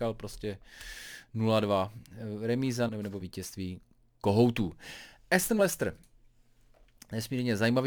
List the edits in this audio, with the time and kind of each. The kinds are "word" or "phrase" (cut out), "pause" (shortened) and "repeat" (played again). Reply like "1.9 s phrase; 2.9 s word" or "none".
2.9 s word; 3.2 s word; 5.6 s word